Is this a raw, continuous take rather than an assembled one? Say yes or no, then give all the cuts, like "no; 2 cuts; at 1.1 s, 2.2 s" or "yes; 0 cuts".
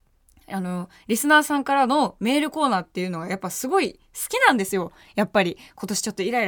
yes; 0 cuts